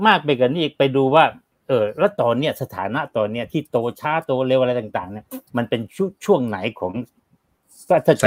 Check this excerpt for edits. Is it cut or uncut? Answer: cut